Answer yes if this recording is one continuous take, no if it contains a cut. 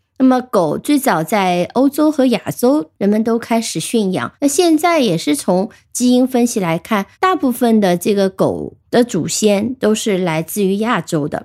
no